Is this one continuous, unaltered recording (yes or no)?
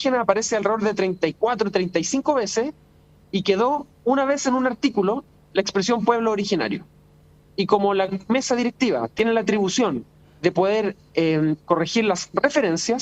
yes